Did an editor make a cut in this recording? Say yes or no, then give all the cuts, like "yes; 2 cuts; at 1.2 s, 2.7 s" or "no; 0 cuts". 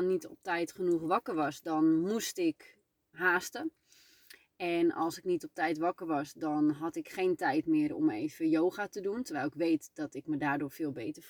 yes; 1 cut; at 3.1 s